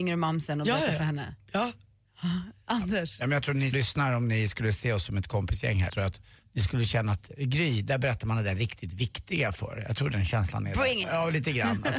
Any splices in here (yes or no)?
yes